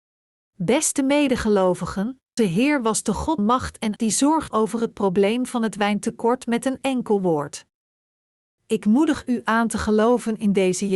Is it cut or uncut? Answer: cut